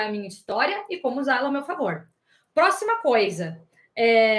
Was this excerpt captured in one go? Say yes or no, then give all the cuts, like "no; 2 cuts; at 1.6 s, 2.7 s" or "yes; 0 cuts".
yes; 0 cuts